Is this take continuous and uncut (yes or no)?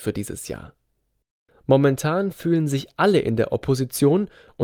yes